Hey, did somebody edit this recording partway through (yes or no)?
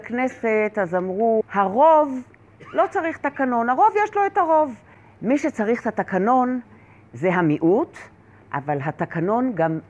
no